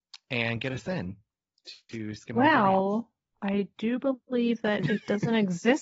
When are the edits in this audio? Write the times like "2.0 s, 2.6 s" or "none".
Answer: none

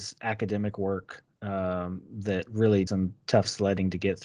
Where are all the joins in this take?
1.3 s, 2.9 s

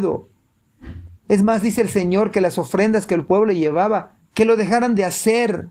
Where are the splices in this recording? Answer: 1.2 s, 4.2 s

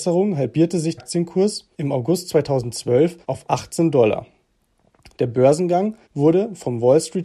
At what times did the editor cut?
1.0 s, 1.7 s, 3.2 s, 6.0 s

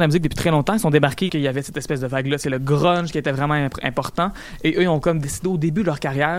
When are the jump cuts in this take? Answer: 1.3 s

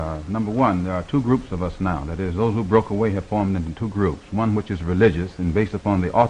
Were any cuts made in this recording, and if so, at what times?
none

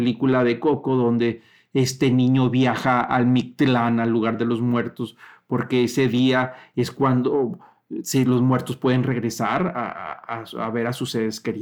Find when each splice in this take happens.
none

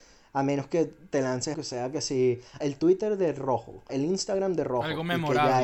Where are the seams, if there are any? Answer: 1.5 s, 2.6 s, 3.9 s

